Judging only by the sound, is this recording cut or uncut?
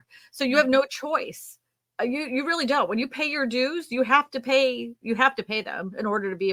uncut